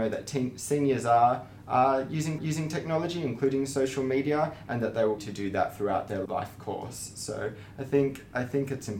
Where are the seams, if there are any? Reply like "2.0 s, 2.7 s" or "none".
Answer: 2.4 s, 5.2 s, 6.3 s